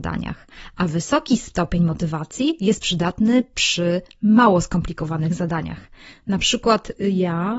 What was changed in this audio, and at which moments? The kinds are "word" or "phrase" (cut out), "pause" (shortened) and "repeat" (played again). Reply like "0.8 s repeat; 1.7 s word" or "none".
none